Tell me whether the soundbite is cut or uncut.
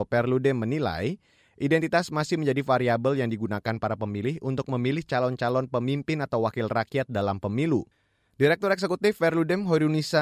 uncut